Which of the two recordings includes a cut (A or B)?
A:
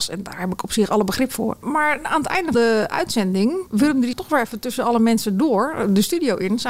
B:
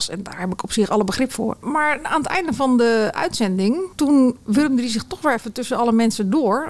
A